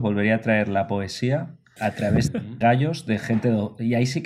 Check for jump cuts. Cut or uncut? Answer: cut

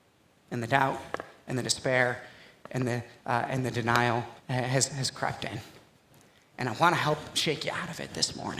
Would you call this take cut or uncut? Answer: cut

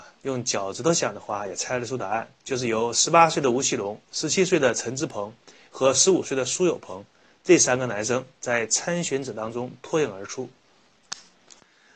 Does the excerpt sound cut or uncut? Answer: uncut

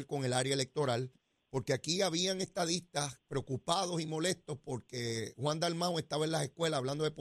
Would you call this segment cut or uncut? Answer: uncut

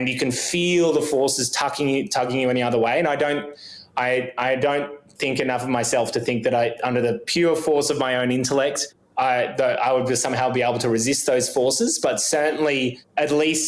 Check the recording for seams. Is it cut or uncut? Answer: uncut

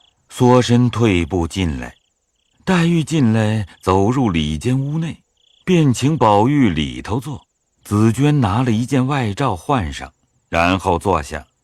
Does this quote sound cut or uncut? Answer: uncut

